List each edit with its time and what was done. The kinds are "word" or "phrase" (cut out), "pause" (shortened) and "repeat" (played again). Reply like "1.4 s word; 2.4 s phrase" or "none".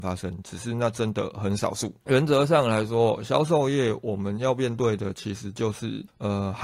2.0 s pause